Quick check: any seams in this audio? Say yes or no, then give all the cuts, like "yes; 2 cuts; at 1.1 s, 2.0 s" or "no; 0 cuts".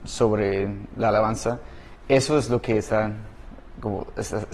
no; 0 cuts